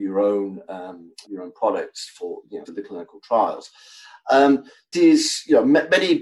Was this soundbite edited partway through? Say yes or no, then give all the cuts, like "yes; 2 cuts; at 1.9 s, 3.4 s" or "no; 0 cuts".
yes; 3 cuts; at 1.2 s, 2.7 s, 4.9 s